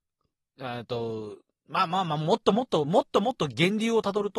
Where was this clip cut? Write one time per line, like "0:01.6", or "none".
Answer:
none